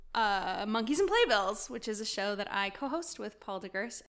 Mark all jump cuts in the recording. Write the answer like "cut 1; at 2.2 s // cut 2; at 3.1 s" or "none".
none